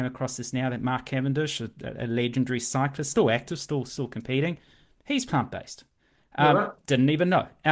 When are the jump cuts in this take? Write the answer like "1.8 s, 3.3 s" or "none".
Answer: none